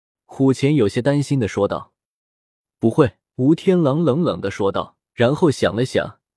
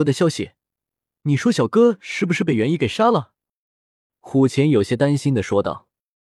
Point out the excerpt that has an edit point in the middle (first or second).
first